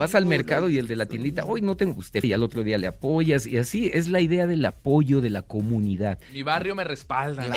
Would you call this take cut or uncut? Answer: cut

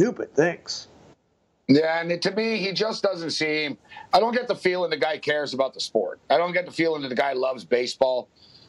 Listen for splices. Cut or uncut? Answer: uncut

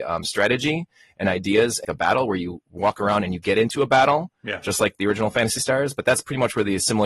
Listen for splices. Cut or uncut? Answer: cut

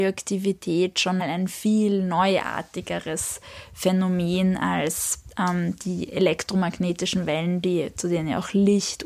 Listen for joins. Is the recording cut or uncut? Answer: cut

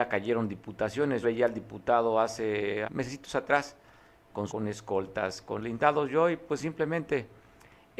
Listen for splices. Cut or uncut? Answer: cut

